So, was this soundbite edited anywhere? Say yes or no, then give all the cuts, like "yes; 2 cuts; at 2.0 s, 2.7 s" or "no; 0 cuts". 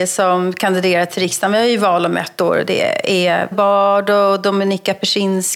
yes; 1 cut; at 3.5 s